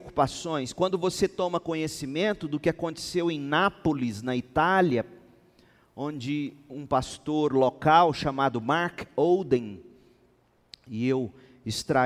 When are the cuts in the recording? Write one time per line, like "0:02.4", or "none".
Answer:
none